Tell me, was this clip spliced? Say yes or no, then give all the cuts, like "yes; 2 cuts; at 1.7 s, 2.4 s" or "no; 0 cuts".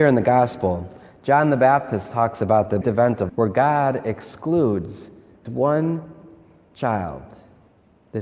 yes; 3 cuts; at 2.8 s, 3.3 s, 5.4 s